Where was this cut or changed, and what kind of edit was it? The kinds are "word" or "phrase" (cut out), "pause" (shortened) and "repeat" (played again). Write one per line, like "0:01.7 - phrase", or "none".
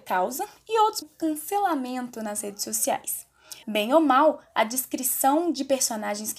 0:01.0 - phrase
0:03.6 - pause